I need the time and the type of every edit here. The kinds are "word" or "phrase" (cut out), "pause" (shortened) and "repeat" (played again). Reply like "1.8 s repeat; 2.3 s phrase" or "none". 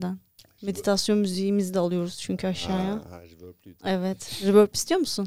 3.8 s pause